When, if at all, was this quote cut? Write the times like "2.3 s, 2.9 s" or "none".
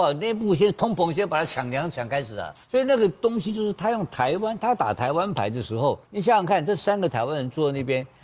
2.6 s, 6.0 s